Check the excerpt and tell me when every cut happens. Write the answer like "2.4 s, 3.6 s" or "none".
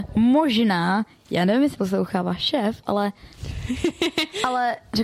1.7 s